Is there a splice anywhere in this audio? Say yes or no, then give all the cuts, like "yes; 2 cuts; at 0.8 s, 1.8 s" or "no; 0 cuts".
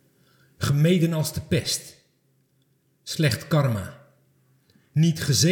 no; 0 cuts